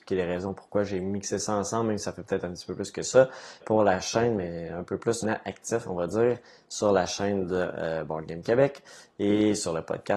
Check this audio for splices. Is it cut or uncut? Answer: cut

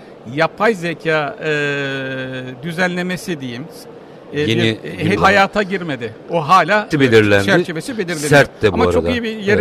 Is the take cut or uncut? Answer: cut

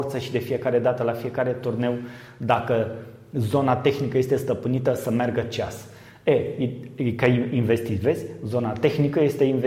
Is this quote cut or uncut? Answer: uncut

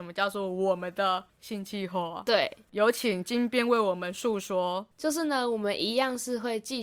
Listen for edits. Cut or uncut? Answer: cut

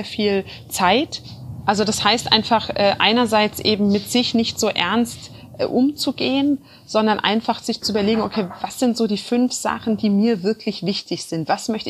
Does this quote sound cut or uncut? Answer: uncut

